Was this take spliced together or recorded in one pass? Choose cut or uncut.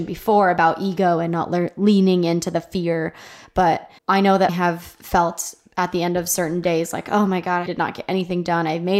cut